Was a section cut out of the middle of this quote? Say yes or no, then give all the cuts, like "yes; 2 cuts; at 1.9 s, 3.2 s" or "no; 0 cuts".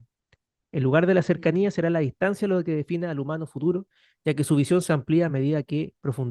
no; 0 cuts